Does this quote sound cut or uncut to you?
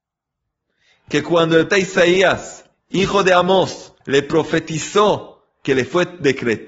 cut